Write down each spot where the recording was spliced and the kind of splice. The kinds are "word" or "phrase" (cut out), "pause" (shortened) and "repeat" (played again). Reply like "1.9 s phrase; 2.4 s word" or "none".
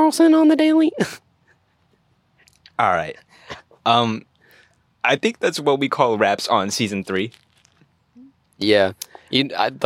none